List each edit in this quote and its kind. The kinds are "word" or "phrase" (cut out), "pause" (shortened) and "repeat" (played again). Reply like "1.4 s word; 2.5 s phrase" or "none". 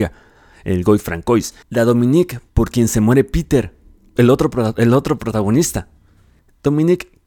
1.6 s pause; 2.5 s pause; 4.2 s word